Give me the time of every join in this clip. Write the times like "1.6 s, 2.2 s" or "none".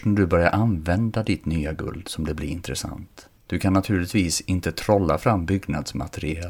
3.4 s